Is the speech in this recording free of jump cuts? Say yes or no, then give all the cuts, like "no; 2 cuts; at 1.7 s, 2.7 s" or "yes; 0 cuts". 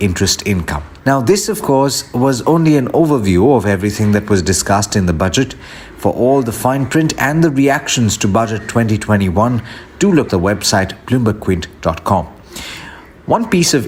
no; 2 cuts; at 1.0 s, 10.3 s